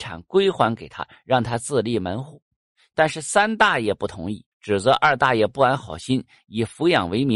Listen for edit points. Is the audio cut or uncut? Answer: cut